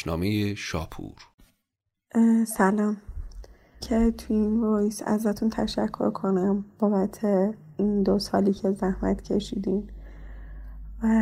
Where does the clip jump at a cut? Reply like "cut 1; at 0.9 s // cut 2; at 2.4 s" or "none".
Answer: cut 1; at 3.8 s